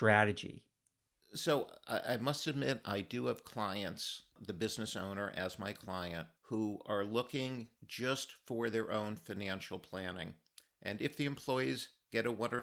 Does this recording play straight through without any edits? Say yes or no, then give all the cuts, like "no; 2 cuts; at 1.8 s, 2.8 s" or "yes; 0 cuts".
no; 3 cuts; at 4.3 s, 6.4 s, 7.8 s